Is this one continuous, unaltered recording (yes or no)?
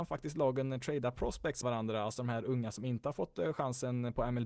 no